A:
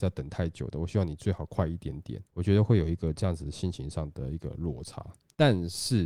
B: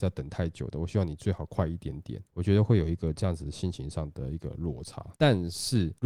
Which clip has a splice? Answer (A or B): B